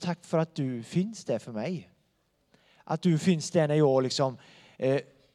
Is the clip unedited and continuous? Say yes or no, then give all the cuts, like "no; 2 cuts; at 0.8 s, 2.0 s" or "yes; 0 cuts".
yes; 0 cuts